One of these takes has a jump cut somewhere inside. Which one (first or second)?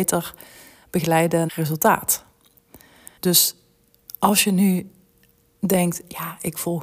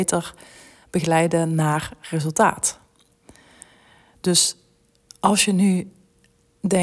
first